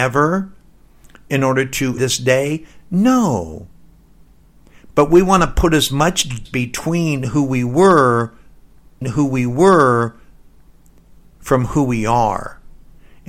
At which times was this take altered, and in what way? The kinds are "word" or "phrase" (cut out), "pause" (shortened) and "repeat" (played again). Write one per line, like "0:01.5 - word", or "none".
0:02.0 - word
0:06.5 - word
0:09.0 - repeat

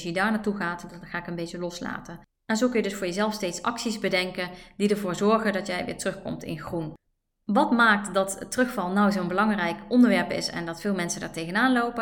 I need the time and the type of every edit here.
none

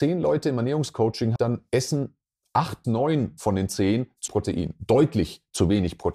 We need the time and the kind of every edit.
0:01.4 - word
0:02.8 - word
0:04.3 - word

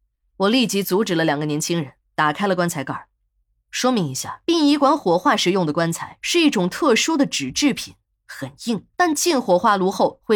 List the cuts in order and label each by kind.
0:04.4 - pause
0:08.9 - pause

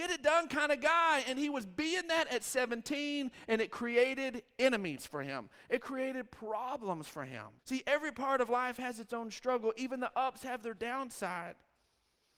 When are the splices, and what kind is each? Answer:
0:07.6 - pause

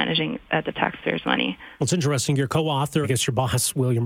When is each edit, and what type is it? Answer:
0:01.7 - pause
0:03.0 - phrase

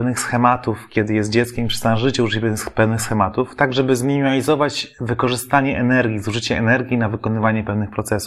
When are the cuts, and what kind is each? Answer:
none

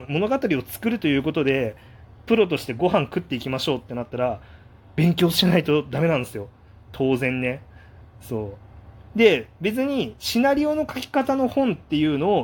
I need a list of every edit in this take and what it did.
none

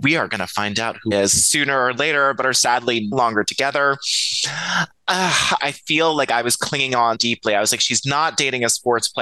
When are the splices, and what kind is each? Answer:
0:01.1 - word
0:03.1 - word
0:05.6 - word
0:07.1 - word

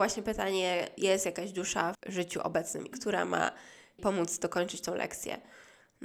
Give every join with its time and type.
0:01.0 - word
0:01.9 - word
0:02.9 - word
0:04.0 - word

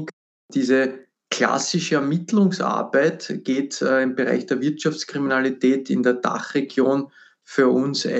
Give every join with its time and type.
none

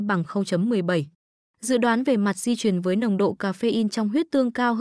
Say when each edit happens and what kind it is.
none

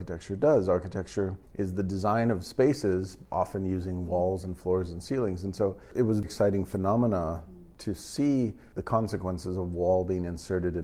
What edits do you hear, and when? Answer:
0:06.2 - word

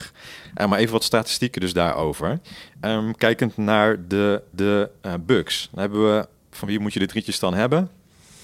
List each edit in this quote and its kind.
0:04.5 - repeat

